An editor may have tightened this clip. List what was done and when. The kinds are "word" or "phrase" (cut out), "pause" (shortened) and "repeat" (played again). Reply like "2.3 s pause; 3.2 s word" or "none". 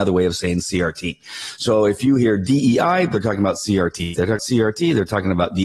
4.4 s word